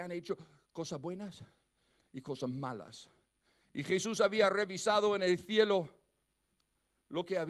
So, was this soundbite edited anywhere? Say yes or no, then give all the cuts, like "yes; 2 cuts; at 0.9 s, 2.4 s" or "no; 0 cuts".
no; 0 cuts